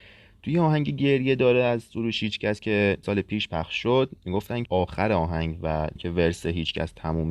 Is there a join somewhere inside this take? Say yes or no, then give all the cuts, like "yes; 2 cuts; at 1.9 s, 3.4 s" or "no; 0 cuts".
yes; 3 cuts; at 3.0 s, 4.7 s, 6.0 s